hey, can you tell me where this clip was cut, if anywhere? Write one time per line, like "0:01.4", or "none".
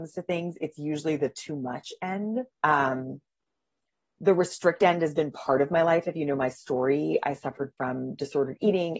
0:02.5